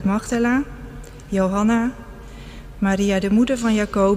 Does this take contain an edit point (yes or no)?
no